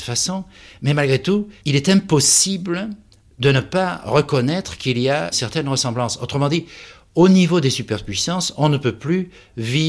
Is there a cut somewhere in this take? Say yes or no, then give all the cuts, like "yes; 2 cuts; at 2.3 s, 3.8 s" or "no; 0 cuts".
yes; 2 cuts; at 1.6 s, 5.3 s